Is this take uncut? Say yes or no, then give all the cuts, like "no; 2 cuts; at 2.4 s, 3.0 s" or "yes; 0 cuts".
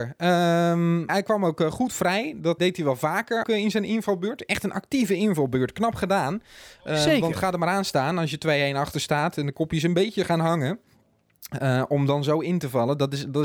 no; 3 cuts; at 1.1 s, 2.6 s, 3.4 s